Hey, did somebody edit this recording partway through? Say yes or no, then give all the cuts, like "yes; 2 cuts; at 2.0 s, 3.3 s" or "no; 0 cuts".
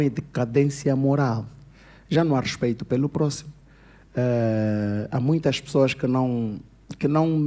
no; 0 cuts